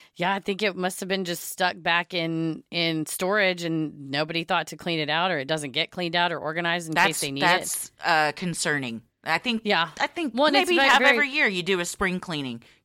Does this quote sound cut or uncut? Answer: uncut